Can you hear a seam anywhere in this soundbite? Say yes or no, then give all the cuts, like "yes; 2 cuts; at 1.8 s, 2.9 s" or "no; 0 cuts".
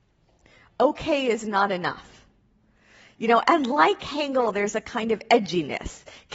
no; 0 cuts